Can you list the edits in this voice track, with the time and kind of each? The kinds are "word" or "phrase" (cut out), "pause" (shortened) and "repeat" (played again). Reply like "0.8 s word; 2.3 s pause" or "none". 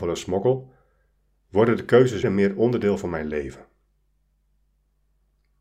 2.2 s word

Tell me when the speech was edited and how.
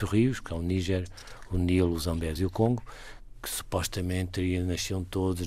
none

